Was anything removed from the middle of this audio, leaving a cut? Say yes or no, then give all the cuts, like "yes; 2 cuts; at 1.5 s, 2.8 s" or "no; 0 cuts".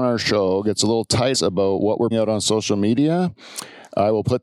yes; 2 cuts; at 1.3 s, 2.1 s